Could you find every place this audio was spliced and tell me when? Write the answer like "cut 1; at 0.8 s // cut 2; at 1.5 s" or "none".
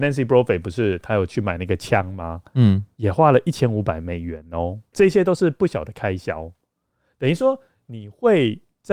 none